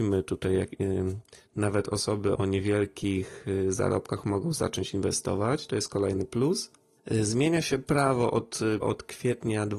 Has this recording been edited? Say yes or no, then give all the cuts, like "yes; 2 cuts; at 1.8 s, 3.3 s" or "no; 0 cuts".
yes; 2 cuts; at 2.4 s, 8.8 s